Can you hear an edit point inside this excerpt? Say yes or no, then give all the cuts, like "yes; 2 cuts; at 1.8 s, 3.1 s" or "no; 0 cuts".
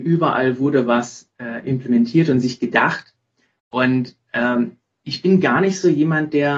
no; 0 cuts